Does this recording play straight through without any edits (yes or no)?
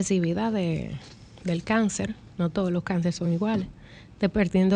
yes